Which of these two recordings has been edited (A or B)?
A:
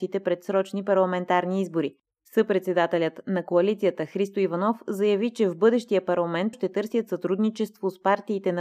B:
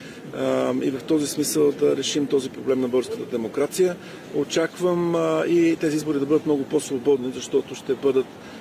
A